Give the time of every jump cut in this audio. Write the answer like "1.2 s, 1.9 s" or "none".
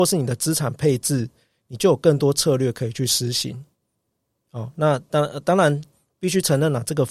none